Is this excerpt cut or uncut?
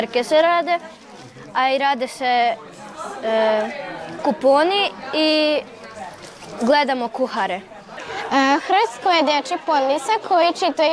cut